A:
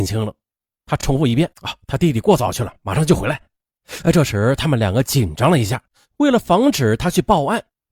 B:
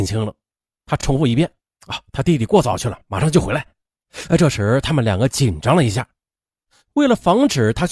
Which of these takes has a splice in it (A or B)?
A